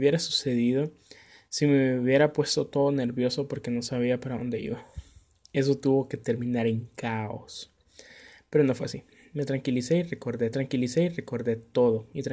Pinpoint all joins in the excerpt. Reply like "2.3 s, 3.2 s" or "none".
10.5 s